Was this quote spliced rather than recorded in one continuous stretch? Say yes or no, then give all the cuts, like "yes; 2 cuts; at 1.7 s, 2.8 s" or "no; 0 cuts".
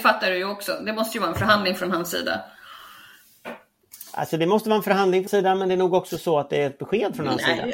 yes; 1 cut; at 5.3 s